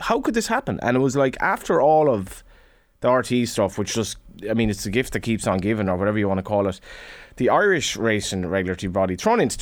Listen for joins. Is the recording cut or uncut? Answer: uncut